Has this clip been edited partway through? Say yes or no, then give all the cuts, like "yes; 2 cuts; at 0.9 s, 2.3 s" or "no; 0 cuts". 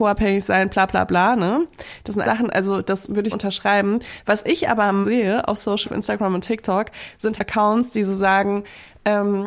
yes; 5 cuts; at 2.2 s, 3.3 s, 5.0 s, 5.8 s, 7.4 s